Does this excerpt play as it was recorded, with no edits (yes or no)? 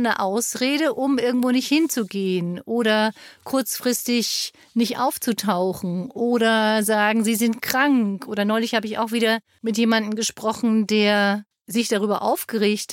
no